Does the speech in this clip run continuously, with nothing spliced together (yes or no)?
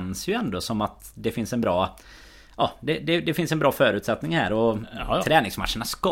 yes